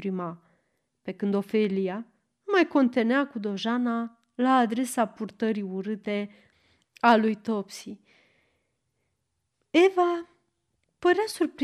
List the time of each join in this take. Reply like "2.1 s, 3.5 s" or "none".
none